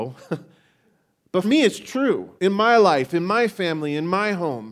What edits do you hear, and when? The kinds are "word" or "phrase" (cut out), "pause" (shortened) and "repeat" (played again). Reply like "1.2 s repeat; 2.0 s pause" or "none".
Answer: 1.4 s word; 2.4 s pause